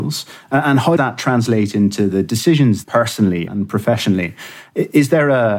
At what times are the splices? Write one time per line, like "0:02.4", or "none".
0:01.0
0:02.8
0:03.5